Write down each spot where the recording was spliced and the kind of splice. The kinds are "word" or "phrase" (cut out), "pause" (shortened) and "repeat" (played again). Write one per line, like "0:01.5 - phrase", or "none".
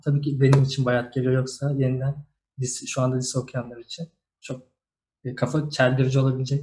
none